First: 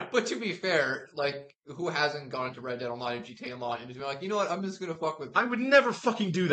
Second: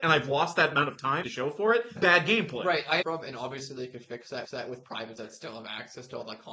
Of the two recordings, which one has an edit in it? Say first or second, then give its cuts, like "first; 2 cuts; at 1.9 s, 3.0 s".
second; 5 cuts; at 1.2 s, 2.0 s, 3.0 s, 4.4 s, 5.2 s